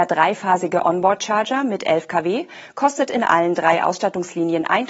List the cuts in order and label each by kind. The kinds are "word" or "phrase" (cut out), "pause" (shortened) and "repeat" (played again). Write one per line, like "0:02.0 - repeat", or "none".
none